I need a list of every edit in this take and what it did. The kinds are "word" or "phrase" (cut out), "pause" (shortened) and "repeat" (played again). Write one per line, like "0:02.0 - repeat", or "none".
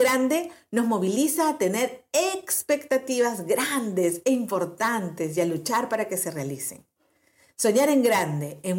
none